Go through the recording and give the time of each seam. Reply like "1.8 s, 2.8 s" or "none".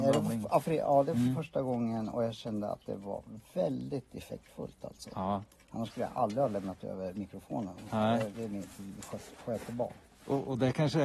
8.3 s